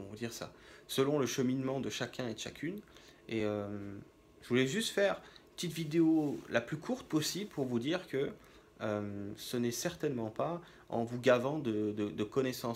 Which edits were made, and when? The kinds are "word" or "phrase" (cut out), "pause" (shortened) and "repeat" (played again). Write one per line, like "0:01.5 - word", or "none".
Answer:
none